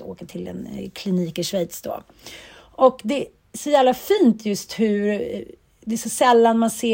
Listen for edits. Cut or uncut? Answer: uncut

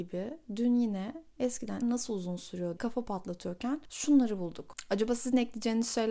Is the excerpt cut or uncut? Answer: cut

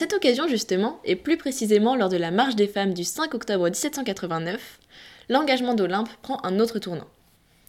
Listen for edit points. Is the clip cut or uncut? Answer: uncut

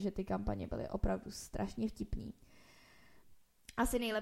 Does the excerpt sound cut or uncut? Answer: uncut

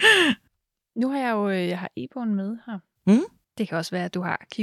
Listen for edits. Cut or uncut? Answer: cut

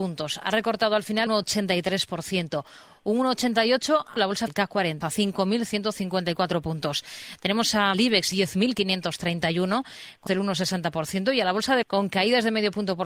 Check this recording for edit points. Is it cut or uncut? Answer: cut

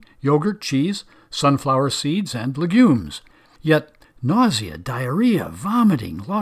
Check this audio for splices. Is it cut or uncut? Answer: uncut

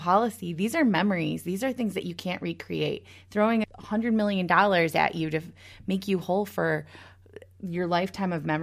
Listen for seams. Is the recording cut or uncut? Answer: cut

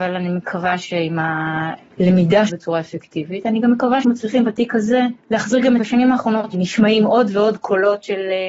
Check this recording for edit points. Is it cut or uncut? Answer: cut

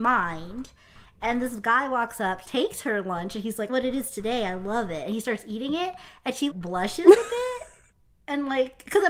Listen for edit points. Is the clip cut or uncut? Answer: cut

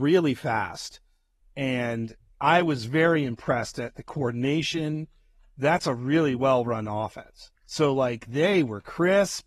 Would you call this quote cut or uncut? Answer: cut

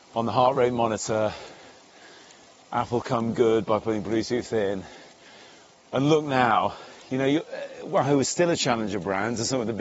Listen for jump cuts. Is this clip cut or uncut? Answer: uncut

